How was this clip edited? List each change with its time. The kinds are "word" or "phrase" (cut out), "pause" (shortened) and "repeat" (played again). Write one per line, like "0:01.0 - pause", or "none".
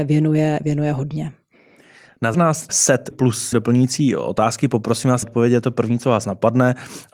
0:02.3 - word
0:02.7 - word
0:03.1 - word
0:03.5 - word
0:05.2 - word